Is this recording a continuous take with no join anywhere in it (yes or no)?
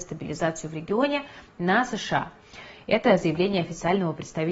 yes